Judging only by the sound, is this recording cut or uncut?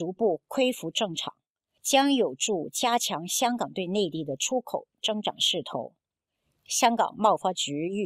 uncut